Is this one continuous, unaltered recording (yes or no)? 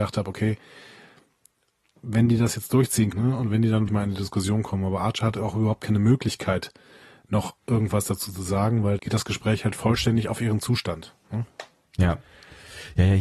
no